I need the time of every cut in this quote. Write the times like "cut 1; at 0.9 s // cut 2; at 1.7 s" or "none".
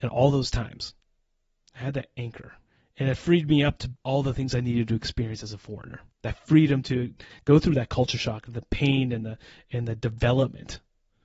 cut 1; at 2.7 s // cut 2; at 4.0 s // cut 3; at 6.1 s